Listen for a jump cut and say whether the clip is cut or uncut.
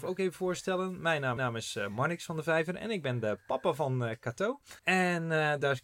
cut